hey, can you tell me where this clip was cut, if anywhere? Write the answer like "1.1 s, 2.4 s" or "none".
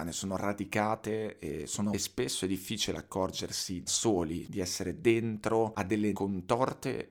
1.9 s, 3.9 s, 6.1 s

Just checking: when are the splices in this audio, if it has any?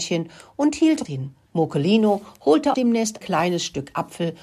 1.0 s, 1.4 s, 2.7 s, 3.2 s

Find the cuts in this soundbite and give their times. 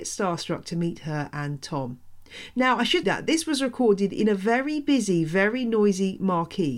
3.0 s

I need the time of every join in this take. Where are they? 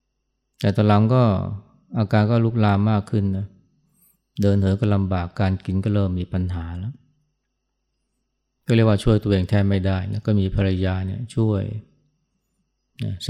none

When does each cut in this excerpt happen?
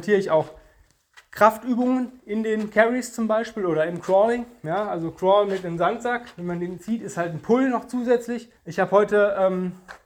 8.6 s

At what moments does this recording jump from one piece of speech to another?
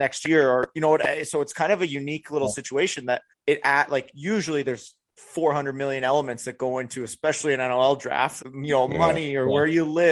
3.3 s, 8.4 s

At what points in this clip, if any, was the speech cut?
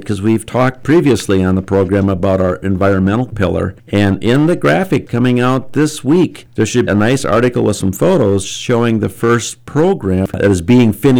5.1 s, 6.9 s

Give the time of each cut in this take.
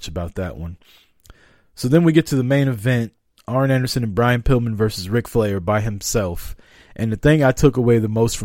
none

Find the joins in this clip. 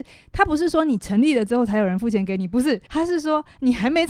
2.9 s

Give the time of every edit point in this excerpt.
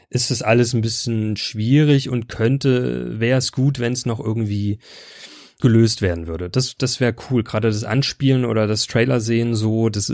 5.6 s, 6.8 s

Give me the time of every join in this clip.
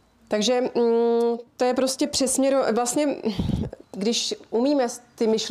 1.5 s, 3.8 s

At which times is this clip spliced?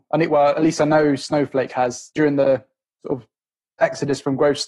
none

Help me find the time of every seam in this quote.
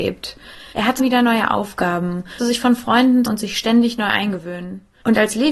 1.0 s, 2.4 s, 3.3 s

